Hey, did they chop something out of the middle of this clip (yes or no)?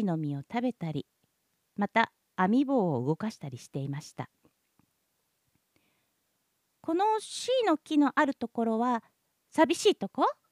no